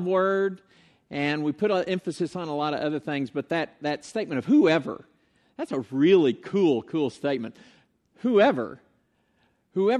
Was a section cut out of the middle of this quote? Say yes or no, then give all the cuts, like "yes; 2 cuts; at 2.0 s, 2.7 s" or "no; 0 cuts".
no; 0 cuts